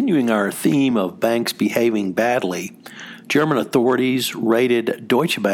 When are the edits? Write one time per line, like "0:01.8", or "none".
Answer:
none